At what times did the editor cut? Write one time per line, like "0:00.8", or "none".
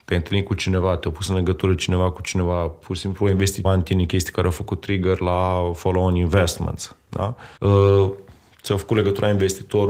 0:03.6
0:07.6